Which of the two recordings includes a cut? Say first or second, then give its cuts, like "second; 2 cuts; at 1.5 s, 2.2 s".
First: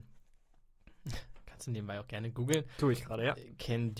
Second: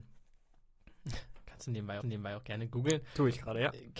second; 1 cut; at 2.0 s